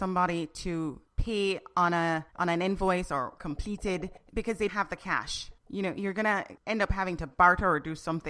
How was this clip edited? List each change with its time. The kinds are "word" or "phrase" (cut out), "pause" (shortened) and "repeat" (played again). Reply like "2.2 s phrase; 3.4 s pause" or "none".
1.1 s pause; 2.3 s pause; 3.4 s word; 4.2 s pause; 4.7 s word; 5.6 s pause; 6.6 s pause